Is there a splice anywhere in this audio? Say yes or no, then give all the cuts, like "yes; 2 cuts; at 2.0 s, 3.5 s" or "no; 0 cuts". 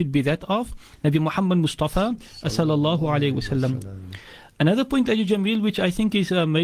no; 0 cuts